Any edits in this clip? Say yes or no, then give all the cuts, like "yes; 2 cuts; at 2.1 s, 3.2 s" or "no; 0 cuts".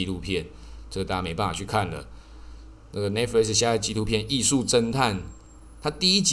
no; 0 cuts